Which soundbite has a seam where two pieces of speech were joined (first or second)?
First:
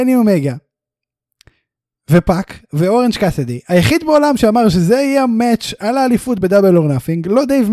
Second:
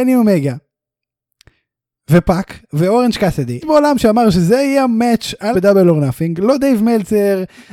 second